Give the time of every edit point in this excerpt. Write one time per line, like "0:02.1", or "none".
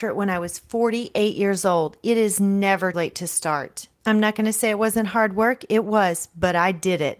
0:02.9